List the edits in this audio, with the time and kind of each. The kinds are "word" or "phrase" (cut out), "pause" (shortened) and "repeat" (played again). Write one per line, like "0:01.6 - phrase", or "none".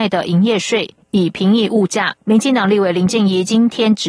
0:02.2 - pause